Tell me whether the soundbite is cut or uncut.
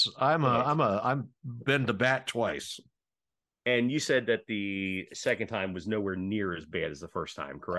uncut